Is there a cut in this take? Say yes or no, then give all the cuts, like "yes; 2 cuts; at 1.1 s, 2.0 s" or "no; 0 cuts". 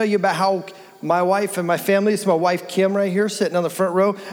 no; 0 cuts